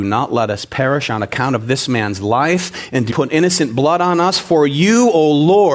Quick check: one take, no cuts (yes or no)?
no